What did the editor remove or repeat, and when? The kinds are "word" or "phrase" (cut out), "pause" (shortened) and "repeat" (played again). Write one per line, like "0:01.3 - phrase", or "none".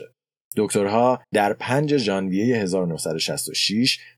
0:01.2 - pause